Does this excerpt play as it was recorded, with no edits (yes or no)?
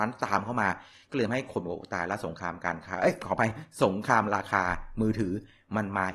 yes